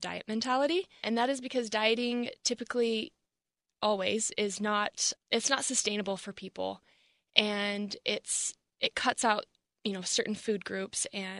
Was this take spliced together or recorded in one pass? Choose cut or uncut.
cut